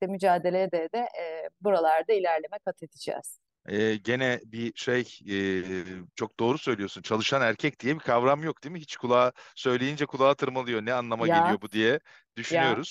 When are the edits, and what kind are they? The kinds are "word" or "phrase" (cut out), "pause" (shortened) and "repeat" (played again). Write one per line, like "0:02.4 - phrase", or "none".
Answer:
0:03.5 - pause
0:06.1 - pause

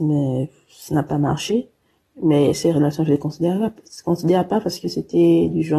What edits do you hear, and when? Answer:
none

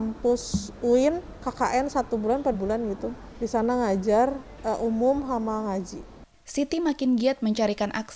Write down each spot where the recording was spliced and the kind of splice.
0:02.5 - word

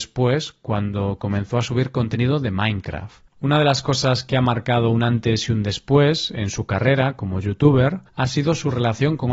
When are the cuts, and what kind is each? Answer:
0:03.3 - pause
0:08.1 - pause

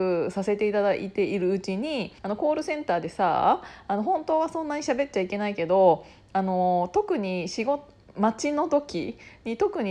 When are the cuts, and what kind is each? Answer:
0:02.2 - pause

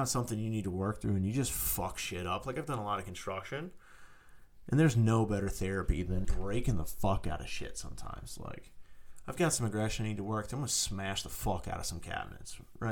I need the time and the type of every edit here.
0:06.2 - word

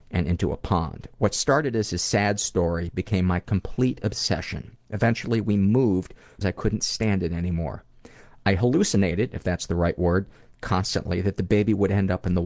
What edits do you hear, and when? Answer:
0:06.4 - word

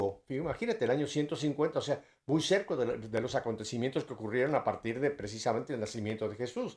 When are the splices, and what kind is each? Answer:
none

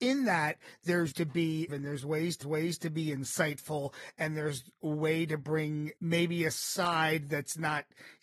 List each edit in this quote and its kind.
0:01.1 - word
0:01.7 - word
0:02.4 - repeat
0:06.0 - word

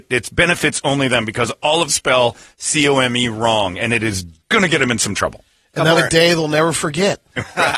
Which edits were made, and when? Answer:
0:01.9 - word
0:04.4 - pause
0:06.0 - word

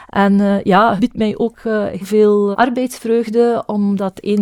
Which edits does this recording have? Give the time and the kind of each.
0:01.0 - word
0:02.0 - word
0:02.5 - word

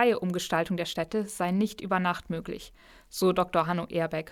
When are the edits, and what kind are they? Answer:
none

